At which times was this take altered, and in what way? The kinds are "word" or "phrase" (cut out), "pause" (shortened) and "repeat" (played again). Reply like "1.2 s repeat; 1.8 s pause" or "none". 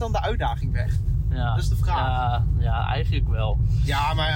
none